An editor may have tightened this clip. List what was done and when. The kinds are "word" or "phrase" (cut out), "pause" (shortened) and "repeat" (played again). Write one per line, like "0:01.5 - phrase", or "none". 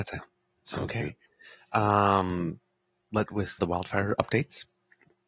0:03.3 - word
0:03.6 - word

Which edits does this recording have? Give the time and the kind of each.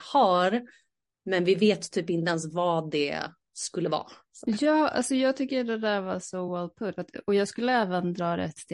none

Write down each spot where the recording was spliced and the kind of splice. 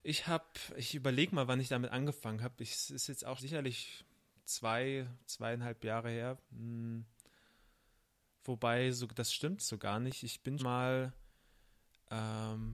0:03.4 - word
0:06.4 - pause
0:09.6 - word
0:10.6 - word

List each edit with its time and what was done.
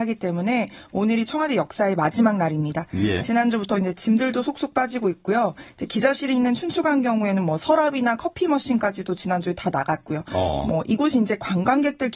none

